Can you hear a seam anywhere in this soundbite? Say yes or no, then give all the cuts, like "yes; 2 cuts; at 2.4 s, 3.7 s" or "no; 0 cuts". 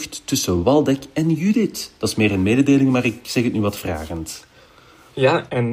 no; 0 cuts